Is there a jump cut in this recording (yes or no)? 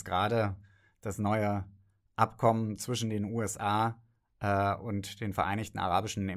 no